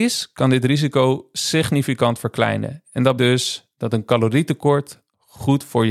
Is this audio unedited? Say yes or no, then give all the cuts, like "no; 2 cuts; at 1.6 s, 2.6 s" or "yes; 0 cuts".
no; 1 cut; at 3.2 s